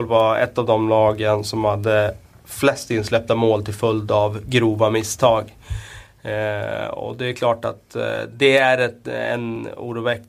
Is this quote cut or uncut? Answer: uncut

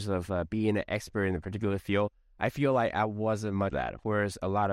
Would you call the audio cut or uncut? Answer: cut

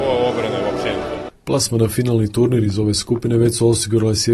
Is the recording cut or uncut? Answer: uncut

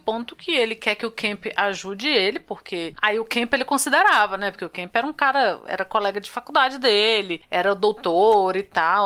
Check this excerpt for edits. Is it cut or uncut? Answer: uncut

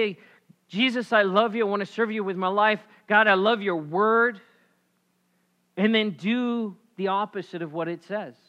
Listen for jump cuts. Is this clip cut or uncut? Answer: uncut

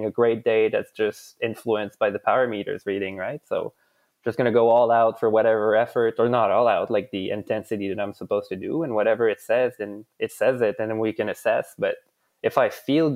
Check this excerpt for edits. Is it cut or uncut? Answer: uncut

